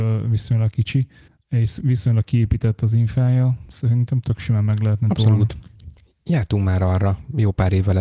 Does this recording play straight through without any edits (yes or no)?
yes